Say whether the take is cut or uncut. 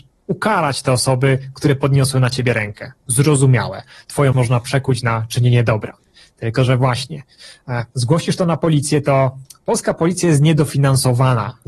cut